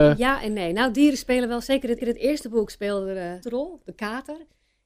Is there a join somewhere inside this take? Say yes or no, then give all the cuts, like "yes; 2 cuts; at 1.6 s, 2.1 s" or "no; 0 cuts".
yes; 2 cuts; at 2.0 s, 3.4 s